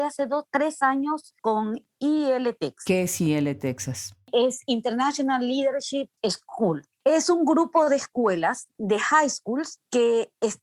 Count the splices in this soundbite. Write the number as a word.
one